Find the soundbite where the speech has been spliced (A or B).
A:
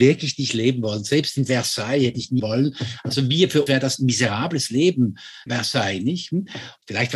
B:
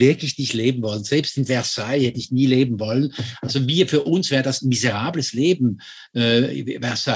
A